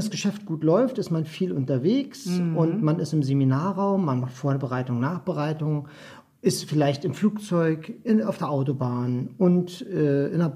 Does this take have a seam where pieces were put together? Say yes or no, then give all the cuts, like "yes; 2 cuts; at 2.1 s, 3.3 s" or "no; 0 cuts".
no; 0 cuts